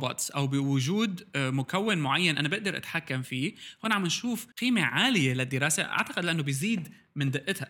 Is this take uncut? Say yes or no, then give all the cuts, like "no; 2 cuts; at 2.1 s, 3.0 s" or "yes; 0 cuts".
no; 1 cut; at 4.5 s